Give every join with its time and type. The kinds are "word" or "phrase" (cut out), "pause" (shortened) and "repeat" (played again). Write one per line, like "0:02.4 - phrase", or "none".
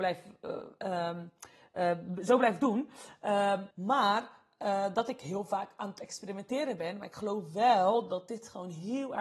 0:03.7 - pause